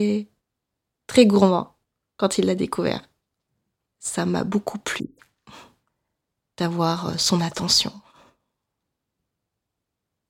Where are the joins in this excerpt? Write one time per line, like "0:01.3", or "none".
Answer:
none